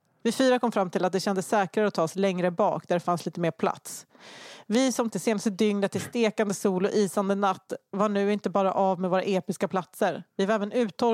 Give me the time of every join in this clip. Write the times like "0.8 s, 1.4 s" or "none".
5.1 s